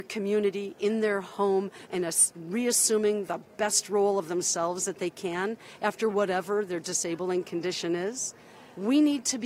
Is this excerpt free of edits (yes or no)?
yes